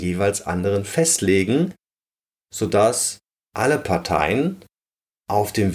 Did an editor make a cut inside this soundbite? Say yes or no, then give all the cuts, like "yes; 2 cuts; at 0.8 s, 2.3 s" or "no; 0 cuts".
no; 0 cuts